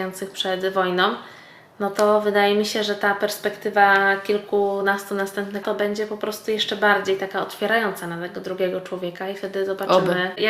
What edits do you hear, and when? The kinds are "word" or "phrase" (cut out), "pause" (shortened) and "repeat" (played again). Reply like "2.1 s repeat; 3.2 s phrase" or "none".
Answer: 5.6 s word